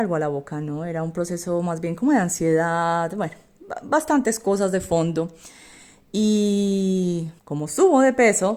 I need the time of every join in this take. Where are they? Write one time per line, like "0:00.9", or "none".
0:07.4